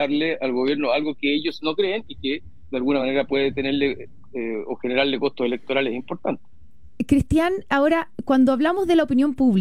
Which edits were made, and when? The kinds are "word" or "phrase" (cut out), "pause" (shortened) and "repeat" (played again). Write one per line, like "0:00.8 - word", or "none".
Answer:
none